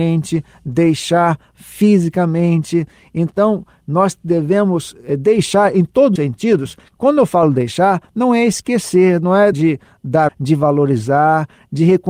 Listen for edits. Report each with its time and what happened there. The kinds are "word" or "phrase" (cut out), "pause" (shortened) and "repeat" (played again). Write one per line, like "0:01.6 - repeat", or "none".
0:06.2 - word
0:09.5 - word
0:10.3 - word